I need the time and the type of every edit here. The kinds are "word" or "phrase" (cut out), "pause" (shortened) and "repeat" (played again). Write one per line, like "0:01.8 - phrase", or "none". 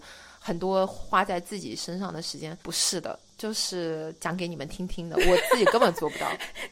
0:02.6 - pause